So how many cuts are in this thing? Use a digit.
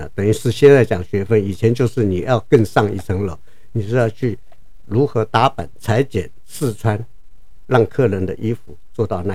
0